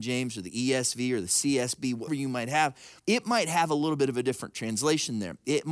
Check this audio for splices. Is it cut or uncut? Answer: cut